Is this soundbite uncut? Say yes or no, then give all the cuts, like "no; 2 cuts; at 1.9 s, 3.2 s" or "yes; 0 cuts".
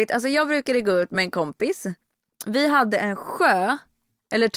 yes; 0 cuts